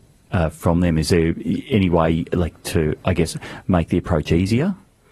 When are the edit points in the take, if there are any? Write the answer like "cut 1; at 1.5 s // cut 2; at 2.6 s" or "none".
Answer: none